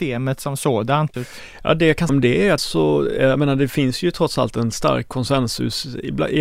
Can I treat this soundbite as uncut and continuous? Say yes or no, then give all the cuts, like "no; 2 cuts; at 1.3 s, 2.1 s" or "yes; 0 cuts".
no; 3 cuts; at 1.1 s, 2.1 s, 2.6 s